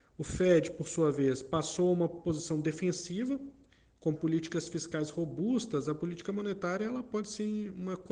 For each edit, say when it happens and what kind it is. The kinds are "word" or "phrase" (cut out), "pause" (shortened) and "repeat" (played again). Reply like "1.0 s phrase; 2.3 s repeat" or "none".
4.1 s word